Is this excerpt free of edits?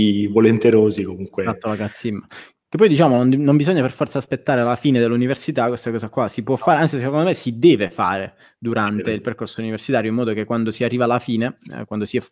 yes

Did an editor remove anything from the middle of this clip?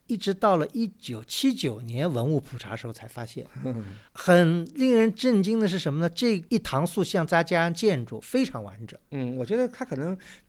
yes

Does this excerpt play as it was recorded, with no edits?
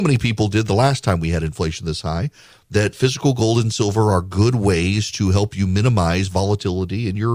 yes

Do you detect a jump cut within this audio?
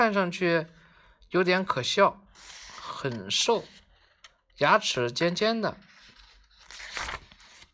no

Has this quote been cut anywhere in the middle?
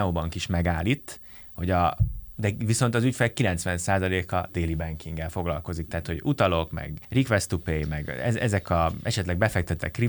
no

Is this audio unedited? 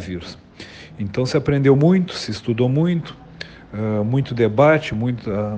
yes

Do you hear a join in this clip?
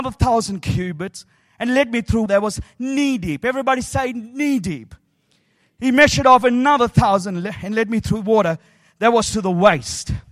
yes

